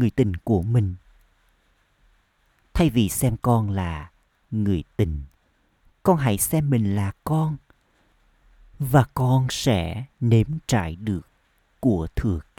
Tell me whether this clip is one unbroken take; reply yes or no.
yes